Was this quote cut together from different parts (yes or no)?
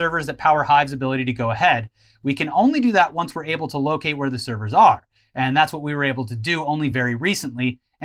no